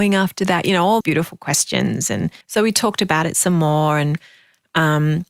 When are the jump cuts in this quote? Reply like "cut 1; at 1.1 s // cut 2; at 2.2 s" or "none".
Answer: cut 1; at 1.0 s // cut 2; at 2.4 s